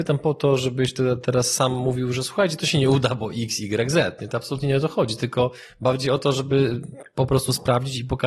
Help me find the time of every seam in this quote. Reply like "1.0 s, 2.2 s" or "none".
none